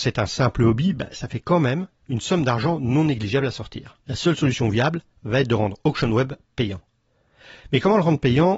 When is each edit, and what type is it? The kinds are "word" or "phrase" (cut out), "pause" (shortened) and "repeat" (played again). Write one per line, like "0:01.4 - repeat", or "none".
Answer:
0:04.0 - pause